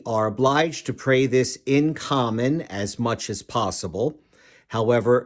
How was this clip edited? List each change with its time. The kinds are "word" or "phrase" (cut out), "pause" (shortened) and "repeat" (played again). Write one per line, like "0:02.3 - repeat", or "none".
none